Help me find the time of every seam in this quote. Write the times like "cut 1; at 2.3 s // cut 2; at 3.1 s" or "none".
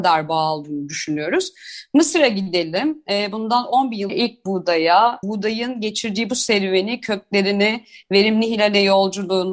cut 1; at 4.1 s // cut 2; at 5.2 s